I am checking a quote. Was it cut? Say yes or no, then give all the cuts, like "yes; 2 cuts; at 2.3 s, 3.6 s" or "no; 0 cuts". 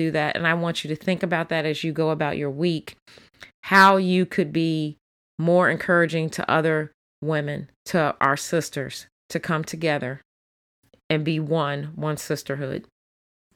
yes; 1 cut; at 7.8 s